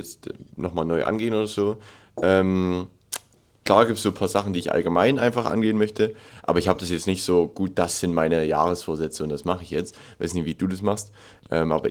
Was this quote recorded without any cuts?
yes; 0 cuts

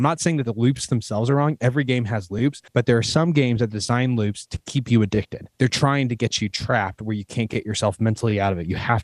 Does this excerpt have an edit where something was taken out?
yes; 2 cuts; at 2.7 s, 5.5 s

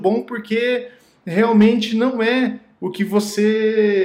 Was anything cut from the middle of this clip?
no; 0 cuts

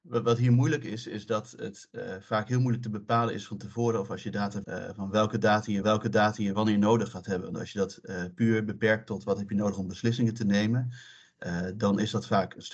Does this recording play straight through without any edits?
no; 2 cuts; at 4.6 s, 5.8 s

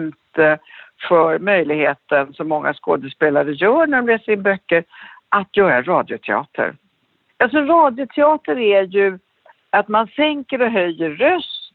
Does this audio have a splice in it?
no; 0 cuts

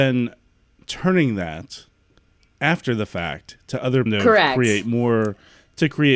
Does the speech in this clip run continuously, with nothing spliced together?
no; 1 cut; at 4.1 s

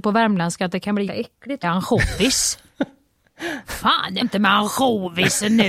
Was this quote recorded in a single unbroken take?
no; 3 cuts; at 1.1 s, 1.6 s, 4.2 s

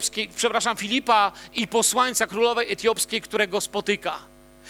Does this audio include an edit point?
no; 0 cuts

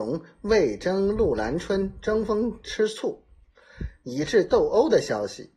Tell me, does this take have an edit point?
no; 0 cuts

